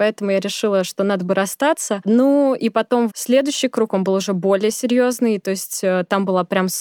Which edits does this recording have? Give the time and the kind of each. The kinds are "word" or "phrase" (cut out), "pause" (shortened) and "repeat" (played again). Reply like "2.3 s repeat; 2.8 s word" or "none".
3.1 s word